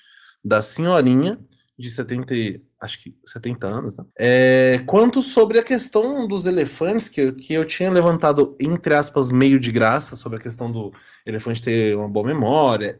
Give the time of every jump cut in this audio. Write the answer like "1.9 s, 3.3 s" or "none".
4.1 s